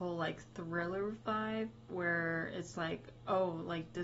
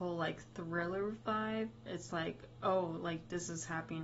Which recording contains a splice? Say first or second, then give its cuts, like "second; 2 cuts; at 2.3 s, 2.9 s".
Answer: second; 1 cut; at 1.9 s